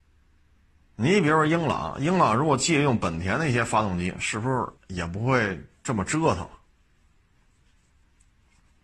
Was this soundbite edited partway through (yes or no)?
yes